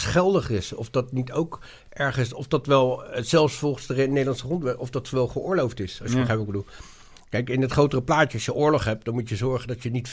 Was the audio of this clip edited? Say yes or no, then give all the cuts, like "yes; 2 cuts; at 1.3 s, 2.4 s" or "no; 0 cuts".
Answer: no; 0 cuts